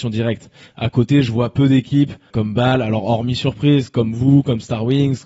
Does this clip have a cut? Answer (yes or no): no